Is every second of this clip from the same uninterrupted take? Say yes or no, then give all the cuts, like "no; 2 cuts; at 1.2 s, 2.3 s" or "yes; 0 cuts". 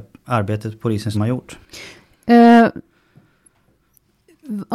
no; 1 cut; at 1.1 s